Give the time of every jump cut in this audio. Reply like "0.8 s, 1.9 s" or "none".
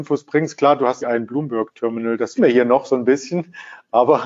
1.0 s, 2.4 s